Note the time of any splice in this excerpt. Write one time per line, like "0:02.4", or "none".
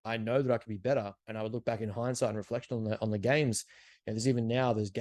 0:01.2